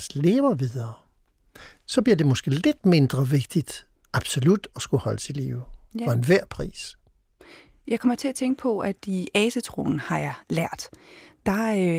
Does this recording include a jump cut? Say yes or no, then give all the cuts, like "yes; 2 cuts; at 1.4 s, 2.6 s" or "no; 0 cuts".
no; 0 cuts